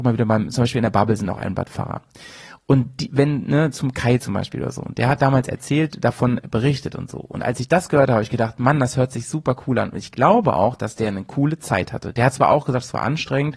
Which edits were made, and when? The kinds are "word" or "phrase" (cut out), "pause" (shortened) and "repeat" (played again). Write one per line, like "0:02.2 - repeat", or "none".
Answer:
none